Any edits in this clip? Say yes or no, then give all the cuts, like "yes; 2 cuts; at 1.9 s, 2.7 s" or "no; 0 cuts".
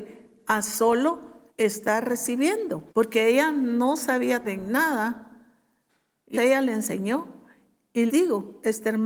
yes; 5 cuts; at 1.5 s, 2.9 s, 4.4 s, 6.3 s, 8.1 s